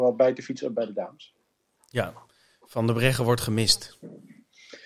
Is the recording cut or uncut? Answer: uncut